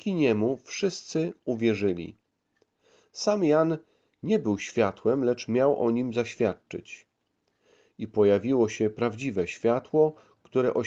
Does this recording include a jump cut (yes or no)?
no